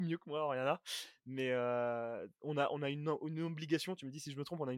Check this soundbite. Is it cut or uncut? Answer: uncut